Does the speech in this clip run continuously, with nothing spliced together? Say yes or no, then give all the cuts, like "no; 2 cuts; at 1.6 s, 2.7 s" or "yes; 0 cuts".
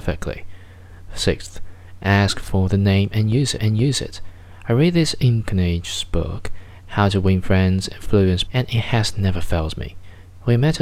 no; 3 cuts; at 3.6 s, 5.4 s, 8.5 s